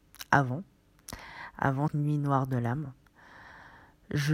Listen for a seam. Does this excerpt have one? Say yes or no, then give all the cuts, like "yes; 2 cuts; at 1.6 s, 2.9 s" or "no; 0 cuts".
yes; 1 cut; at 1.9 s